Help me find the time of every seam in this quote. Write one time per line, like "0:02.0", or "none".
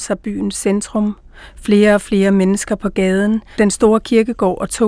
none